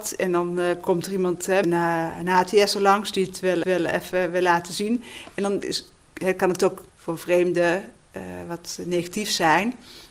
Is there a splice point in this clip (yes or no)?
yes